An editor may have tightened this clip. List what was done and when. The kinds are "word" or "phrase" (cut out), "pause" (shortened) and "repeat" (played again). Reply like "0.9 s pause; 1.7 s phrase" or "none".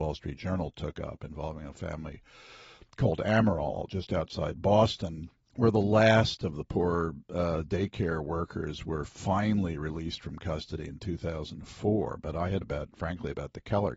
5.4 s pause; 12.6 s phrase